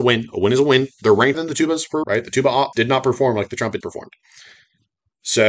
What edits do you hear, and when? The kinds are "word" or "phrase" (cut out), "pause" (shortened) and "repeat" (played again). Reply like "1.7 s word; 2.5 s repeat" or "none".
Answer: 1.3 s word; 2.0 s word; 2.7 s word; 3.8 s word